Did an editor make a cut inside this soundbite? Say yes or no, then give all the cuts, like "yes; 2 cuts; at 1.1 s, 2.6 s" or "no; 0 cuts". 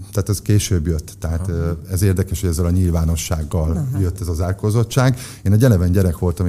no; 0 cuts